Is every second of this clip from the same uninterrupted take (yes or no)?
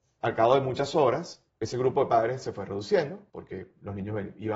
no